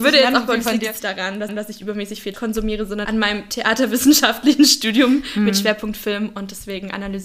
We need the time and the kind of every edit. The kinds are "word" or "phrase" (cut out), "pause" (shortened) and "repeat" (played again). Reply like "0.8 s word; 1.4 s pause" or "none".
1.0 s word; 1.5 s repeat; 2.3 s word; 3.0 s word